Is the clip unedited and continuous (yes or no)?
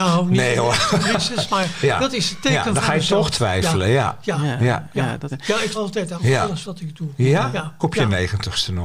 no